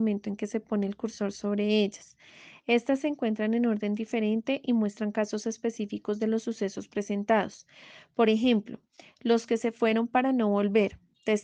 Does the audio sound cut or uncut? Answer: uncut